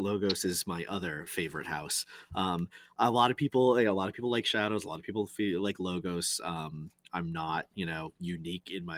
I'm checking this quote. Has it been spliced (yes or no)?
no